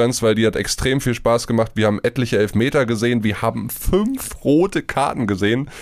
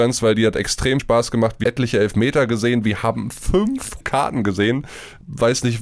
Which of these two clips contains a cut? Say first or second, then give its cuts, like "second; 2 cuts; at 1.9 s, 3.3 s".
second; 3 cuts; at 1.0 s, 1.6 s, 4.0 s